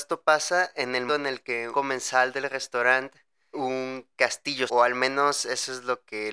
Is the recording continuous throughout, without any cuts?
no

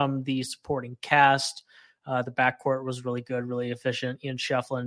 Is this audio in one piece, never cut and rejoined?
yes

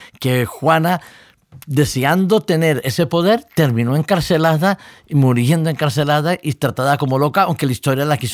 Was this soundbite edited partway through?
no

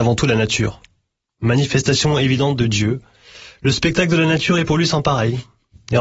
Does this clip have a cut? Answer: no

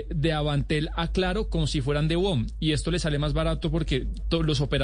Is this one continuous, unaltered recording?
yes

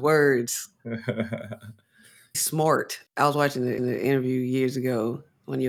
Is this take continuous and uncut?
no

